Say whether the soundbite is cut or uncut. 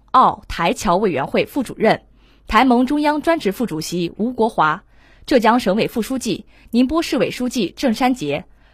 uncut